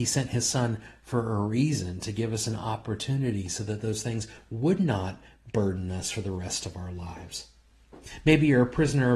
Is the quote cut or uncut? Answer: uncut